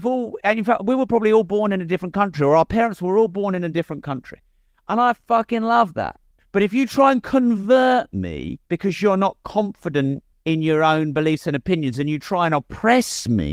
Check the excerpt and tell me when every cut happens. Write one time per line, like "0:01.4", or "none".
0:06.3
0:08.6
0:10.3

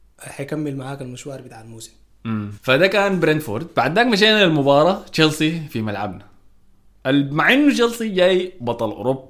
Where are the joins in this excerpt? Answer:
none

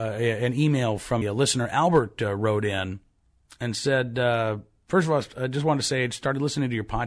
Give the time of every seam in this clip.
0:01.2

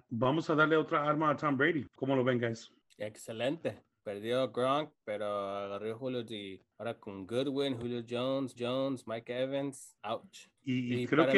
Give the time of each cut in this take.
0:06.3
0:08.6

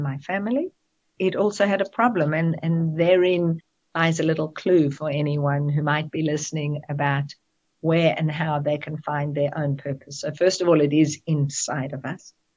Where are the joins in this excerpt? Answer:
none

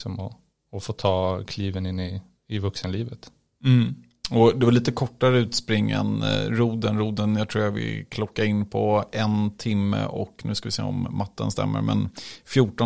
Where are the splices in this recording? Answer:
none

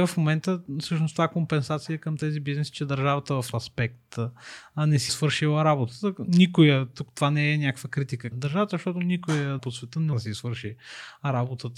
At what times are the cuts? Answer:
0:03.5
0:05.1
0:08.3
0:09.6
0:10.1

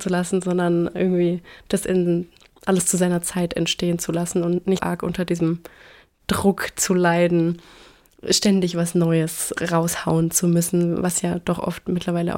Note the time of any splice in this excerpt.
0:04.8

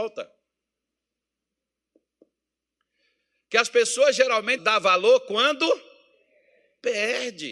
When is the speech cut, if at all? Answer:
0:04.6

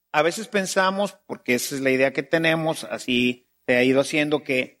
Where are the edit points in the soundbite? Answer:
0:03.6

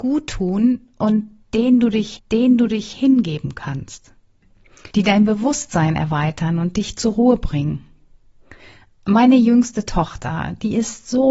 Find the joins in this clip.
0:02.2
0:04.9

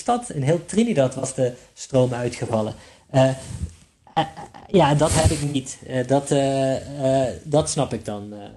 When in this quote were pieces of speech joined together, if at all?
none

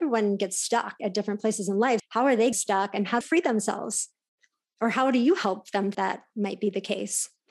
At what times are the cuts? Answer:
0:01.0
0:02.0
0:02.5
0:03.2
0:05.9

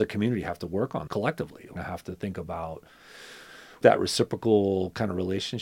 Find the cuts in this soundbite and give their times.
0:01.1
0:01.8
0:03.8

